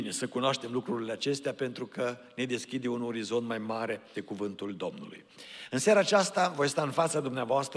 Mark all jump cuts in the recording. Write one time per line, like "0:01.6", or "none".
0:04.1